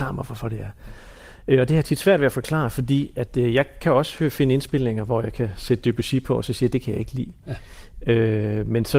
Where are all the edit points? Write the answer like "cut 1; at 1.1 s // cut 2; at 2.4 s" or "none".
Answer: none